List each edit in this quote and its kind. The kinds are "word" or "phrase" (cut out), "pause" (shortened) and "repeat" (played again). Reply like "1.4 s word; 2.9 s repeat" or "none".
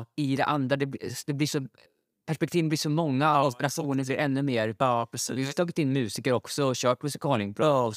none